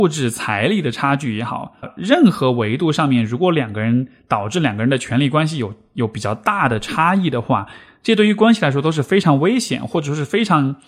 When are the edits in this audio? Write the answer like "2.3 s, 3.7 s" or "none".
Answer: 1.8 s